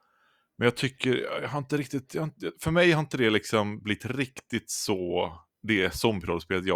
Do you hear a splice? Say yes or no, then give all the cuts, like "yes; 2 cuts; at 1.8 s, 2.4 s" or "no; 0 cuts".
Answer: no; 0 cuts